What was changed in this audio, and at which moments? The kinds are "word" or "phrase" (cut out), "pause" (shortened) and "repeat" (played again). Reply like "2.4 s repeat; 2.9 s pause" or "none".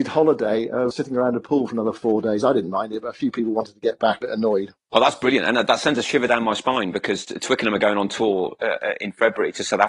0.9 s word; 4.2 s phrase; 4.8 s pause